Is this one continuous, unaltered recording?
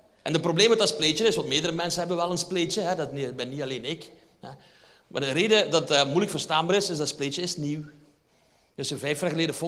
yes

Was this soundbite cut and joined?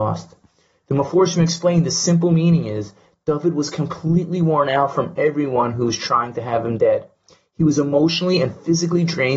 no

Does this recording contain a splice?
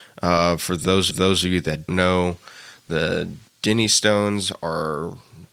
yes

